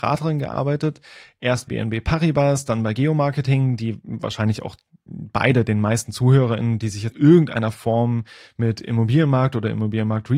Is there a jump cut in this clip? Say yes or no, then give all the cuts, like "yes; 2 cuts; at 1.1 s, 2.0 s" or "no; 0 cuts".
yes; 3 cuts; at 1.7 s, 3.0 s, 7.1 s